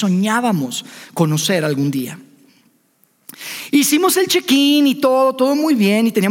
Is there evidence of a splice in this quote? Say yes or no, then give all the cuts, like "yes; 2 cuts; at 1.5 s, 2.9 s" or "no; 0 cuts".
no; 0 cuts